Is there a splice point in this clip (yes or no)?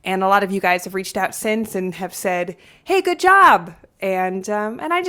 no